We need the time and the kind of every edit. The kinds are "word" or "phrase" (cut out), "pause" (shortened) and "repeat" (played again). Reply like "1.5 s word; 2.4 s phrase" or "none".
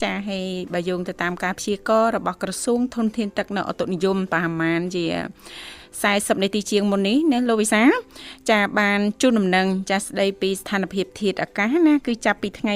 none